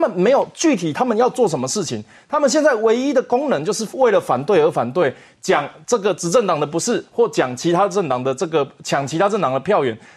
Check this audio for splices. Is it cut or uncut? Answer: uncut